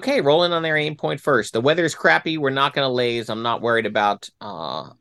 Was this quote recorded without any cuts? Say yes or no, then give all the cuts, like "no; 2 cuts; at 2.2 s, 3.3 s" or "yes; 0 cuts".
yes; 0 cuts